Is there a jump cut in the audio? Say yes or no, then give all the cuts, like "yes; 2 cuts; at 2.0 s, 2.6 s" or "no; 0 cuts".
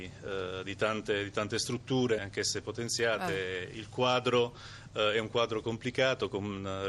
yes; 1 cut; at 2.2 s